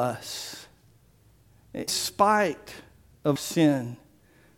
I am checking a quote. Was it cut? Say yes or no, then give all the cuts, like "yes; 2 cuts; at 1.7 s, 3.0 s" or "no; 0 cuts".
yes; 2 cuts; at 1.9 s, 3.4 s